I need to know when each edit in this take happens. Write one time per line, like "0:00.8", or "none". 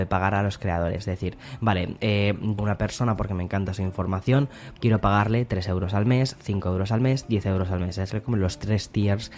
0:02.6
0:04.8
0:08.1